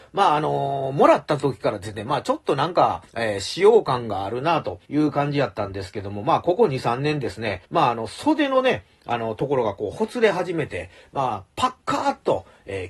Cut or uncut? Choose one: cut